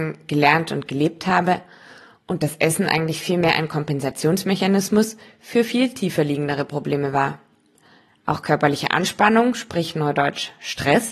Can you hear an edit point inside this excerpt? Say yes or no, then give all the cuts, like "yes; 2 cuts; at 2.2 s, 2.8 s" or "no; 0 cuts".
no; 0 cuts